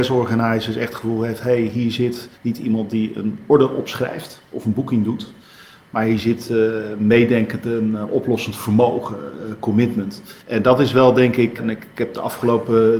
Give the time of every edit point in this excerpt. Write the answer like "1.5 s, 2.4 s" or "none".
2.3 s, 10.4 s, 11.6 s